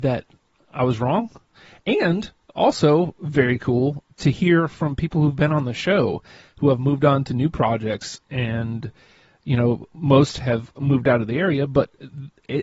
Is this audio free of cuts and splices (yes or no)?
yes